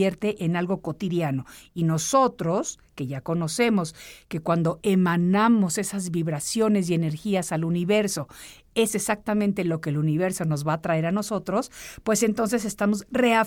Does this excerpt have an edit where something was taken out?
no; 0 cuts

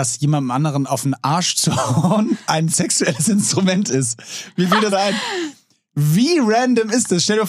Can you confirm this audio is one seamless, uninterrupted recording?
no; 1 cut; at 4.9 s

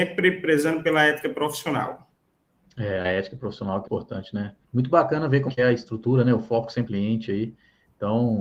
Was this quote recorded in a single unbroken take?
no; 5 cuts; at 2.5 s, 3.9 s, 4.6 s, 5.5 s, 6.9 s

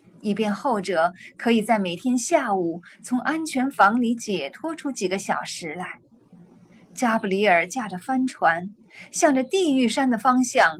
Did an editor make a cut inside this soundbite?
no; 0 cuts

